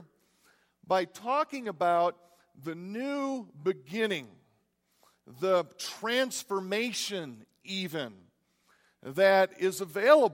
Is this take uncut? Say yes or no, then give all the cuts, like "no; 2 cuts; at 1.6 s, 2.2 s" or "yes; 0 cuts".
yes; 0 cuts